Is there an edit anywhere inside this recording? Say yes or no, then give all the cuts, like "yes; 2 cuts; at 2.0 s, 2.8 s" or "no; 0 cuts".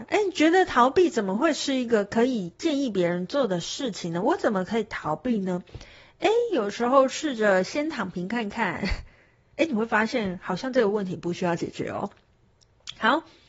no; 0 cuts